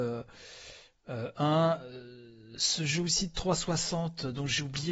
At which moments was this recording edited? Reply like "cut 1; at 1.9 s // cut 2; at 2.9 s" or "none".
none

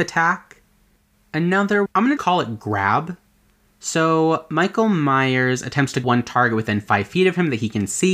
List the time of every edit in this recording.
cut 1; at 1.9 s // cut 2; at 2.2 s // cut 3; at 6.0 s

